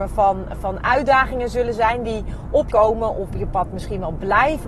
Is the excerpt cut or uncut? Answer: cut